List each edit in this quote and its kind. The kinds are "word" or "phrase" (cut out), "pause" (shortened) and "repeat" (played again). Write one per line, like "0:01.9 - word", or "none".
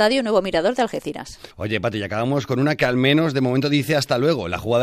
0:01.5 - pause